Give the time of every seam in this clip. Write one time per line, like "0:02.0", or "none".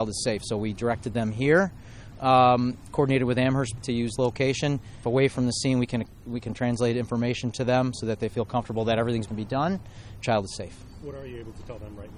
0:03.8
0:04.2
0:05.0
0:09.3
0:10.2